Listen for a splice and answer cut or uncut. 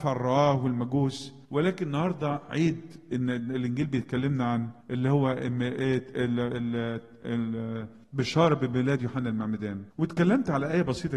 cut